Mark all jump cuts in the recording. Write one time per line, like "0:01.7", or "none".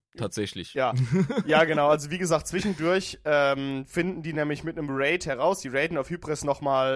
none